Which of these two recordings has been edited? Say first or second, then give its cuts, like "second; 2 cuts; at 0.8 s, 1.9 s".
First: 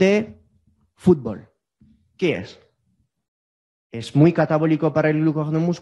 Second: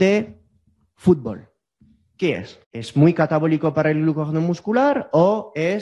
second; 1 cut; at 2.6 s